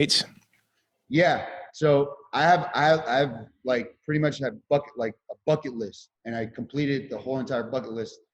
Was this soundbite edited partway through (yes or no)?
yes